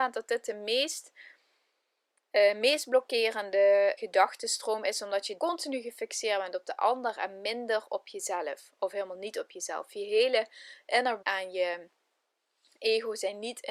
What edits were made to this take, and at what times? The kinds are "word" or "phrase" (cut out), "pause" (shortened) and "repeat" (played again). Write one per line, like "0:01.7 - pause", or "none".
0:04.0 - word
0:05.4 - word
0:11.2 - word